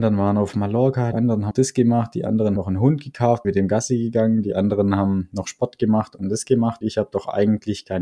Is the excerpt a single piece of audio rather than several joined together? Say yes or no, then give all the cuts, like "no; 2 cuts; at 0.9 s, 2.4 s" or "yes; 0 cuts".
no; 5 cuts; at 1.1 s, 1.5 s, 2.6 s, 3.4 s, 6.8 s